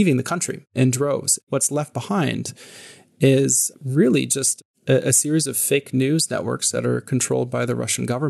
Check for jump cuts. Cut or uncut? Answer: uncut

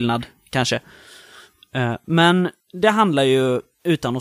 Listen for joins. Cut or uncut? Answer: cut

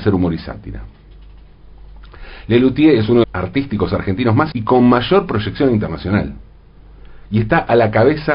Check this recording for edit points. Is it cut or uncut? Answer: cut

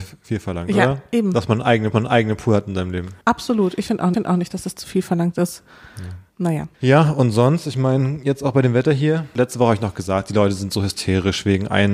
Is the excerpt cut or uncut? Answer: cut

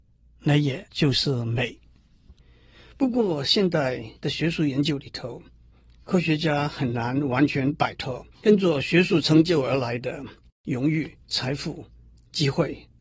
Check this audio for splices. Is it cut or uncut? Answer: cut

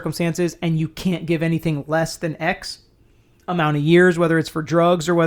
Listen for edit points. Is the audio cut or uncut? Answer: uncut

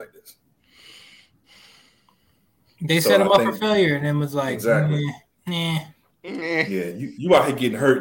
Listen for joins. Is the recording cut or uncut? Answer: uncut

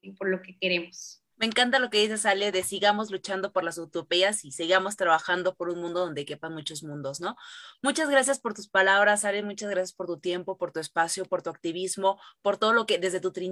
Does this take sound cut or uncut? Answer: cut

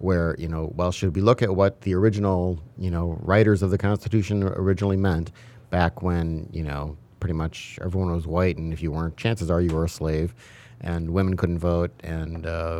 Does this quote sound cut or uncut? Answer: uncut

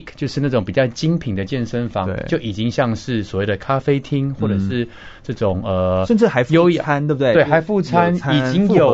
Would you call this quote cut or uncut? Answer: uncut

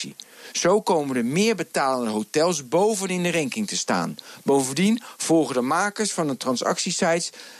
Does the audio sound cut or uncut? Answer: uncut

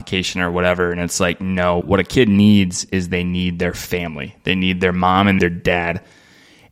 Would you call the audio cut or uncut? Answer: cut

